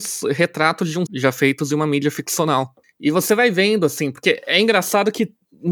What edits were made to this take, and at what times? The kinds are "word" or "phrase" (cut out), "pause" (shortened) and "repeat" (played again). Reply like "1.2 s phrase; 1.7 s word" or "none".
1.1 s word